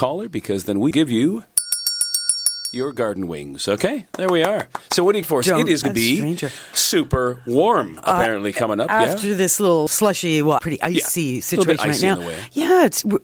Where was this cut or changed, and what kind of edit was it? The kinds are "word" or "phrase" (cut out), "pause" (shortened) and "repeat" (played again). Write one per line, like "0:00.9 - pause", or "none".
0:00.9 - word
0:05.2 - word
0:05.8 - word
0:09.9 - word
0:10.6 - word